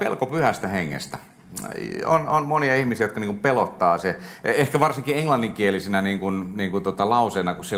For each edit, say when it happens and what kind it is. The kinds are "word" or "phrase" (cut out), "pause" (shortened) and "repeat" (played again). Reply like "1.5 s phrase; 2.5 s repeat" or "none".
none